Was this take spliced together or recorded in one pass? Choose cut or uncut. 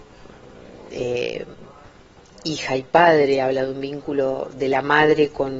uncut